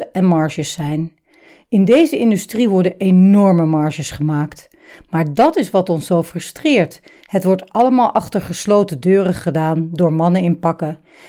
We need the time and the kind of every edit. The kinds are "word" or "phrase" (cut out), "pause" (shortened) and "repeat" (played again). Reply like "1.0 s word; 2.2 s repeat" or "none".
none